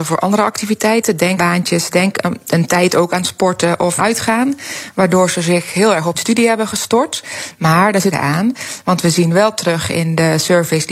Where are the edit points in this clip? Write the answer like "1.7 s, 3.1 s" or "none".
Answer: 1.4 s, 4.0 s, 6.1 s, 8.1 s